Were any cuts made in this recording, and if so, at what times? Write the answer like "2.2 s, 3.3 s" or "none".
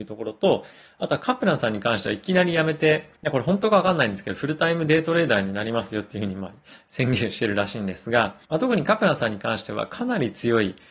3.2 s, 8.4 s